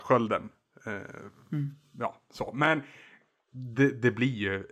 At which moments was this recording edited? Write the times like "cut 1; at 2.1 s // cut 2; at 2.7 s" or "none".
none